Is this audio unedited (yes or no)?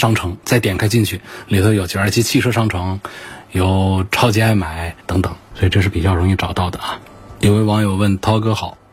no